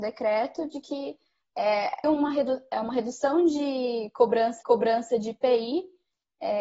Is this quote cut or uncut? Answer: cut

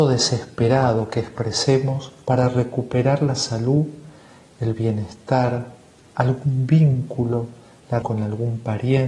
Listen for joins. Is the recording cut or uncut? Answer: cut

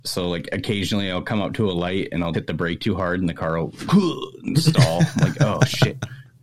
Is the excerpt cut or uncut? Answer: cut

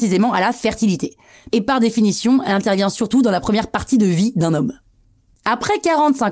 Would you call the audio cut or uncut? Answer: uncut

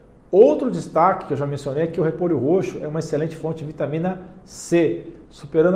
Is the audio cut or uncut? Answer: uncut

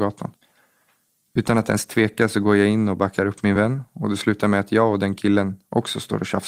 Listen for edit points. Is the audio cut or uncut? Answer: uncut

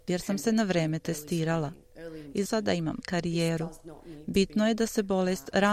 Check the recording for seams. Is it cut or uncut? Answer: cut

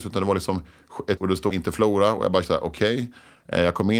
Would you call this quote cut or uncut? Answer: cut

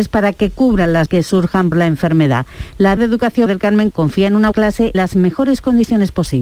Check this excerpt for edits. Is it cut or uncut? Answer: cut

